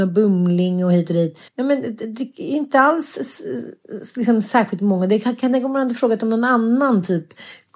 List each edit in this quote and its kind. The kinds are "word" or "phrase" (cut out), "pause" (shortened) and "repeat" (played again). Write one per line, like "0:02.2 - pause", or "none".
0:01.5 - pause